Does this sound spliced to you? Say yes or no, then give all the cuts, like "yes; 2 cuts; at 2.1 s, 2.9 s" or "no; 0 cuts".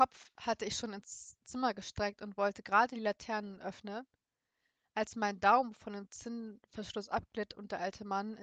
no; 0 cuts